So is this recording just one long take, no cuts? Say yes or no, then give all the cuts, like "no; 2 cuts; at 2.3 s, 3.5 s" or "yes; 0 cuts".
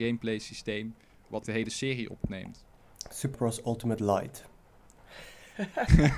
no; 3 cuts; at 1.4 s, 2.2 s, 3.3 s